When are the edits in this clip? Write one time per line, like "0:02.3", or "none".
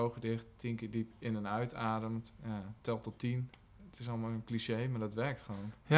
none